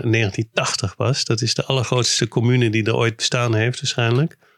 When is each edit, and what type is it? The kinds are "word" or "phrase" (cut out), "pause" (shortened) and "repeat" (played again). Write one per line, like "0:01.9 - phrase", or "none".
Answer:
none